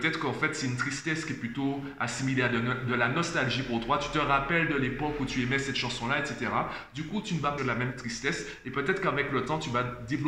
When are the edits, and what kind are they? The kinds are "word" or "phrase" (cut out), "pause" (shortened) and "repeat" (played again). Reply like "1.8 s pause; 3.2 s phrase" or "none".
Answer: 7.6 s word